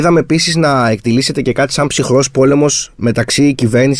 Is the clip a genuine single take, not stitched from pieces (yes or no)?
yes